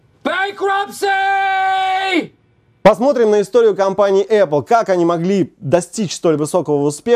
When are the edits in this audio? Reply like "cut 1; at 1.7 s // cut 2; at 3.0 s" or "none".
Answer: none